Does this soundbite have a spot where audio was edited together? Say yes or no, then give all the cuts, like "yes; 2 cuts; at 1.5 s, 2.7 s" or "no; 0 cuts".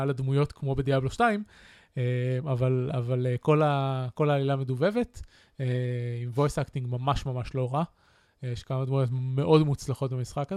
no; 0 cuts